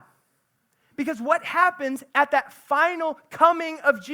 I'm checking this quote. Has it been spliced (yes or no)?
no